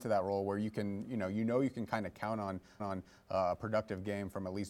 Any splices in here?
yes; 1 cut; at 2.8 s

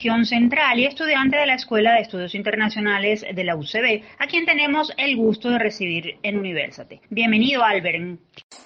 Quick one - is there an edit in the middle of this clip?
yes; 1 cut; at 7.0 s

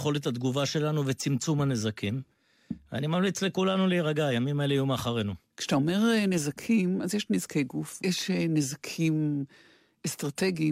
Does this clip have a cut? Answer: yes; 1 cut; at 8.0 s

